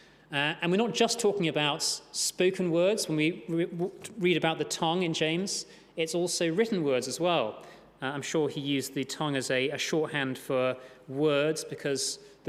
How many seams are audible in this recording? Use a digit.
0